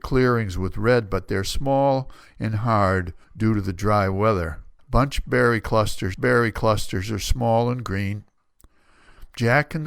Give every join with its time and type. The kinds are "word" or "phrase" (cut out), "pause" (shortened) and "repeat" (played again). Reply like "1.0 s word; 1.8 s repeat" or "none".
3.2 s pause; 4.8 s pause; 6.1 s repeat